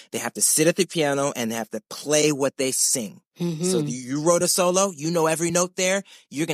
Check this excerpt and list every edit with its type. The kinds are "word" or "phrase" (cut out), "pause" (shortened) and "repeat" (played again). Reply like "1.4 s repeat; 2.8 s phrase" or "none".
none